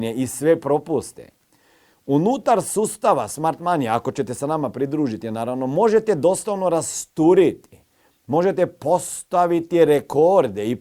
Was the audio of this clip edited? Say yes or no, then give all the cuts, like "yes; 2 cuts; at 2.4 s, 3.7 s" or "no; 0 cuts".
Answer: no; 0 cuts